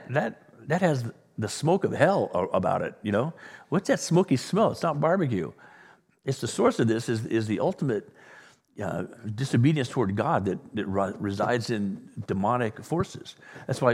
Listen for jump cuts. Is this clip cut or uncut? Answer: uncut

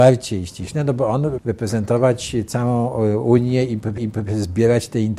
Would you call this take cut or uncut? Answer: cut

